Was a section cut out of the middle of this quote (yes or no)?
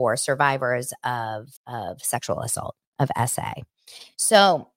yes